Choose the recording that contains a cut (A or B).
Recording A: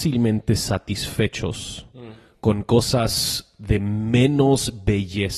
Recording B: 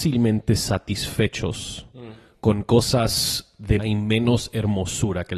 B